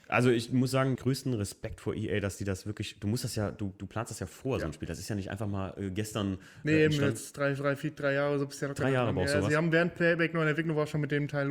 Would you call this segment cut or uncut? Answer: cut